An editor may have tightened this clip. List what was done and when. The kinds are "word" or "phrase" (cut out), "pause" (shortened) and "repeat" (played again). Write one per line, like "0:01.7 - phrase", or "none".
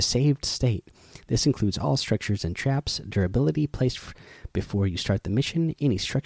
none